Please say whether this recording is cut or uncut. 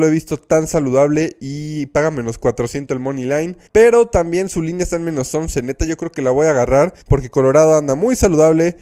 cut